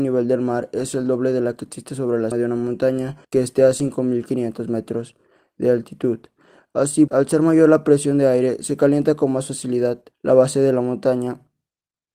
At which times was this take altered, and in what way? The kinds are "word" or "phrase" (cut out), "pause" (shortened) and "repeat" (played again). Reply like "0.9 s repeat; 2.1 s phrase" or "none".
2.3 s word; 3.2 s pause; 7.1 s word; 10.1 s pause